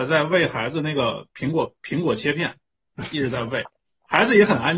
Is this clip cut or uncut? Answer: uncut